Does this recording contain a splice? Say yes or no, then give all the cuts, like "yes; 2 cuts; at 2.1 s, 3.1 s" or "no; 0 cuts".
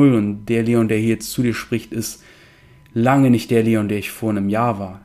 no; 0 cuts